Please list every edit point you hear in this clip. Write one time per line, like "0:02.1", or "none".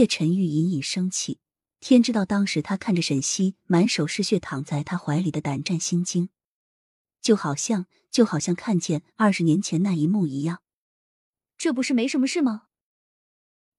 none